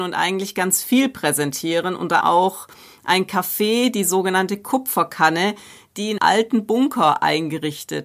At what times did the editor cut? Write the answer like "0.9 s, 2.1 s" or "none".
2.2 s, 6.2 s